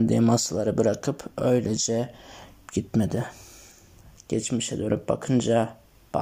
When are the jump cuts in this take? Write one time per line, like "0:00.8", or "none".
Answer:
0:02.7

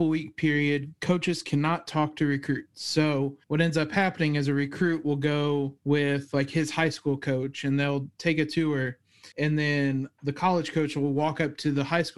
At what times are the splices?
0:03.4
0:05.8
0:08.1
0:09.3

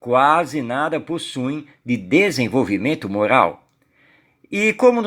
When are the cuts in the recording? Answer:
none

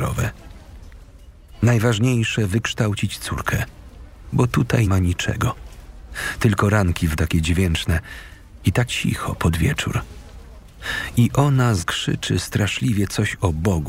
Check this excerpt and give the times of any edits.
0:04.9
0:07.2
0:08.9
0:11.8

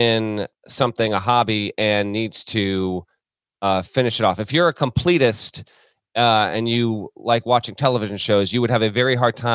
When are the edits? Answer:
none

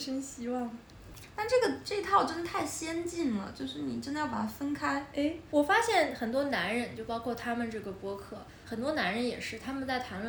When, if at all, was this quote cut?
none

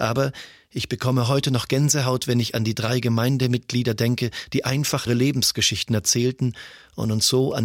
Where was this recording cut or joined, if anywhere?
0:05.1

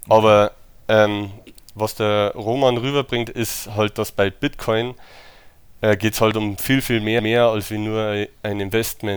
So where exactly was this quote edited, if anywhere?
0:07.2

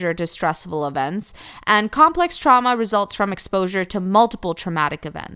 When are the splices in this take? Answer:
none

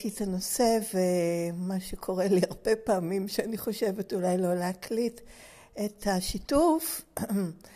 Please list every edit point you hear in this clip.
none

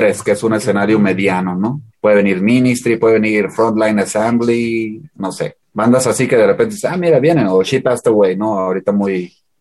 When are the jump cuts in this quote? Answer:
0:01.9
0:05.6

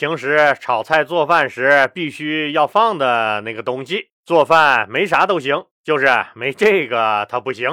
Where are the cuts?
0:04.1
0:05.7

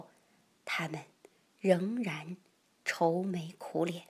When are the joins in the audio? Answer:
none

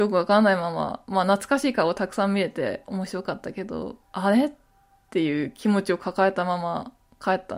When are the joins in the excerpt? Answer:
0:04.0

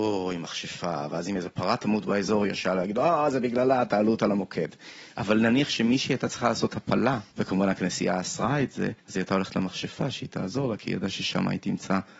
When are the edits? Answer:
0:07.3
0:09.0

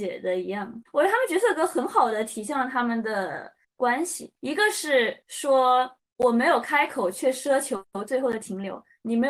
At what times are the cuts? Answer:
0:03.6
0:04.4
0:05.2

